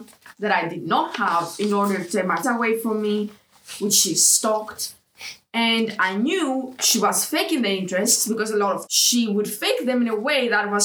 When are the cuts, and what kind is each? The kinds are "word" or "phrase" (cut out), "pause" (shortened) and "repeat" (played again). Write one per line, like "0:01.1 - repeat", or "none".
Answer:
0:02.4 - word
0:08.9 - word

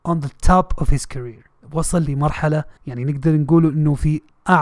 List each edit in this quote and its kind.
0:01.6 - pause
0:02.8 - pause

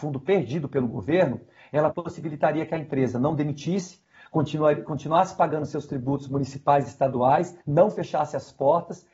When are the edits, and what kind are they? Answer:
0:01.9 - word
0:07.6 - pause

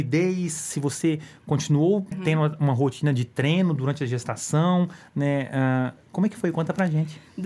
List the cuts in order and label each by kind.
0:02.1 - word

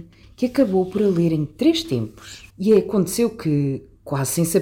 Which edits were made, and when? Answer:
0:02.5 - pause

